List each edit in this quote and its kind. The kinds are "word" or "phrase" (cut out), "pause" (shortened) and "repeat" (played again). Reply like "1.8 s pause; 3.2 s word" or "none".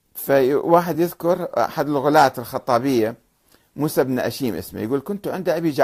none

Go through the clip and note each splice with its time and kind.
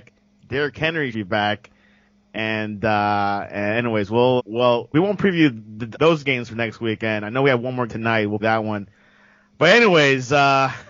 1.1 s word; 4.4 s word; 4.9 s word; 5.9 s word; 7.9 s word; 8.4 s word

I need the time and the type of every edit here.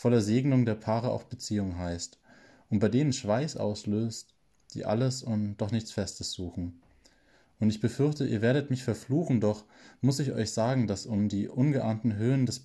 none

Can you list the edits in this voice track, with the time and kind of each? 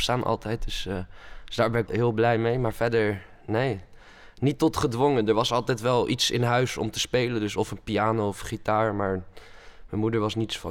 1.9 s word

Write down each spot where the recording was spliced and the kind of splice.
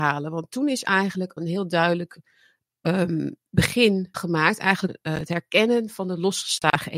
1.4 s word; 4.1 s word; 4.9 s word

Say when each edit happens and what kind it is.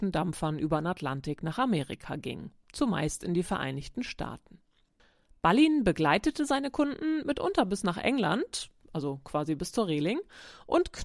none

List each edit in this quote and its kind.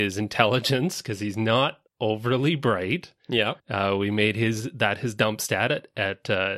1.9 s pause; 3.6 s pause

